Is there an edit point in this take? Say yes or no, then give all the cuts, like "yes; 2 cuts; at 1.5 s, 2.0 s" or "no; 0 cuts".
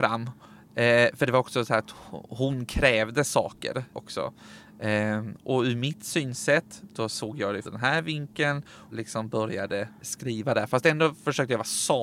yes; 4 cuts; at 3.9 s, 7.6 s, 8.9 s, 10.0 s